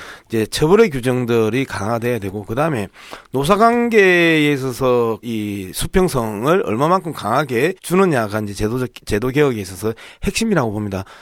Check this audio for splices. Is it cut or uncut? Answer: cut